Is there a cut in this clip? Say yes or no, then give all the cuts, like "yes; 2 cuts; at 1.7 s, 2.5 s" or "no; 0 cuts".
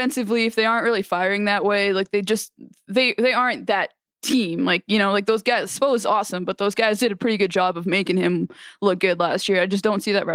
no; 0 cuts